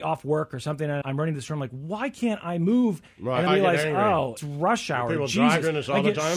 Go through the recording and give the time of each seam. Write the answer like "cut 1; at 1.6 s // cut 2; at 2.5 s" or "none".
cut 1; at 1.0 s // cut 2; at 3.5 s // cut 3; at 4.4 s